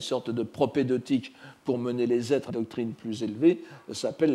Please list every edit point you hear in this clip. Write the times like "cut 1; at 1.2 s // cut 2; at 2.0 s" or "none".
cut 1; at 2.5 s